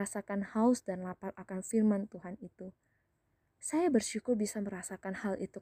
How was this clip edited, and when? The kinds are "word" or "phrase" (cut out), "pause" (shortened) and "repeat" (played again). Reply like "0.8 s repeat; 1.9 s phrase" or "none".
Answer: none

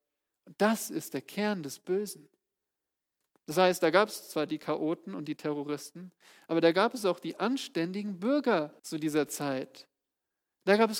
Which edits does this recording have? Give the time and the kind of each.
8.8 s pause

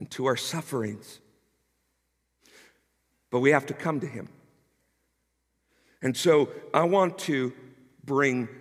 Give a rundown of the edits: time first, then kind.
none

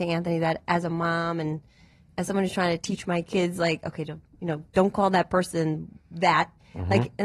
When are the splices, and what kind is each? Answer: none

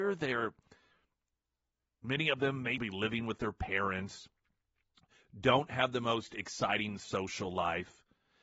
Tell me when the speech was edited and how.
2.8 s word

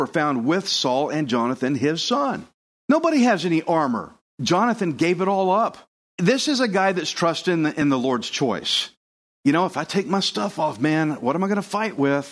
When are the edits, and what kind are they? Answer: none

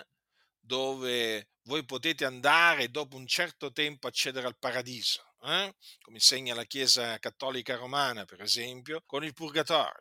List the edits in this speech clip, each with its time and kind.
9.1 s pause

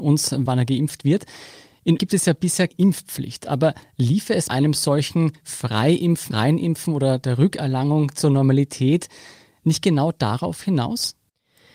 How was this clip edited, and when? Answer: 2.0 s word; 2.7 s word; 4.5 s word; 6.3 s word

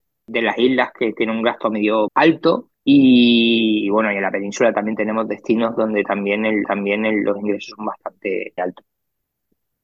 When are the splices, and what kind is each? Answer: 2.1 s word; 2.7 s pause; 6.6 s repeat; 8.6 s word

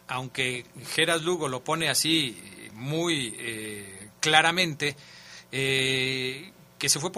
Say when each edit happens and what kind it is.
none

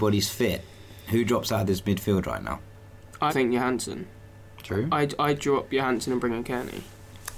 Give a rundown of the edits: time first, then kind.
3.3 s word

